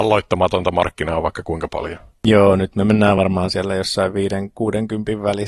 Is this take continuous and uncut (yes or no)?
yes